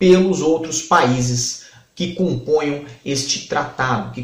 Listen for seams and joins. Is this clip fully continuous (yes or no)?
yes